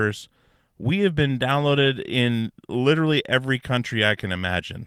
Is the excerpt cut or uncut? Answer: uncut